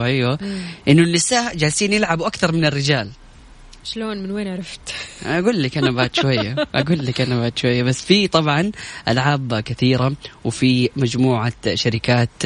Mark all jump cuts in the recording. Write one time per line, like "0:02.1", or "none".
none